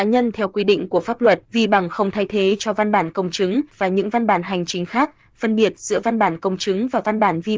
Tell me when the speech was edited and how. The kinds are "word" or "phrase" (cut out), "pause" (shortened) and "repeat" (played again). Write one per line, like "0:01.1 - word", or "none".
0:01.4 - pause
0:03.7 - phrase